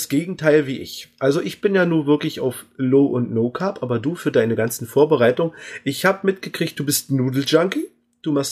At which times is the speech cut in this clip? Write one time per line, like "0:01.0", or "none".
none